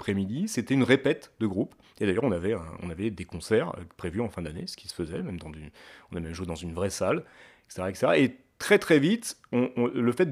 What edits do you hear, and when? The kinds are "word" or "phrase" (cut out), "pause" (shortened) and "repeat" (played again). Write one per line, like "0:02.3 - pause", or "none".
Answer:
none

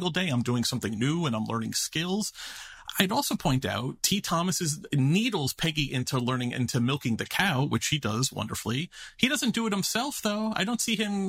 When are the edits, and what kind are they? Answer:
0:04.0 - pause

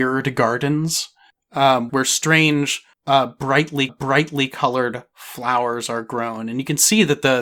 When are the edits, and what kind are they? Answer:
0:01.9 - word
0:02.9 - pause
0:03.9 - repeat

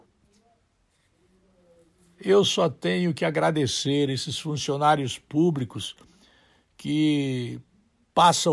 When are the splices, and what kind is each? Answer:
none

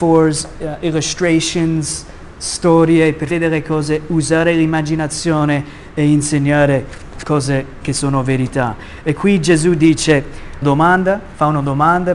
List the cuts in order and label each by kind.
0:03.3 - phrase
0:07.1 - word
0:07.8 - word
0:10.6 - phrase

